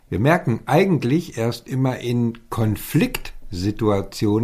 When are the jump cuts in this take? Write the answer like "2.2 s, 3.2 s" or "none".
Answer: none